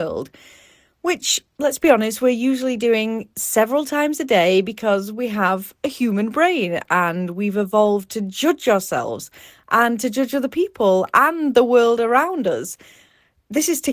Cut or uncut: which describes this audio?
uncut